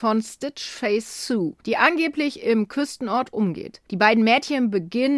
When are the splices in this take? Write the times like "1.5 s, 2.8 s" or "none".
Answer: none